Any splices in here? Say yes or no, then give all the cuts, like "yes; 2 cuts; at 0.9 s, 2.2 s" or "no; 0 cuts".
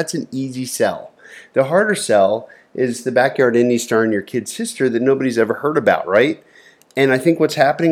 no; 0 cuts